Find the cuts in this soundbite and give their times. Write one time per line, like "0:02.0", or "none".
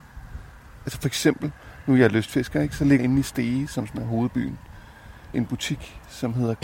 0:03.0
0:05.3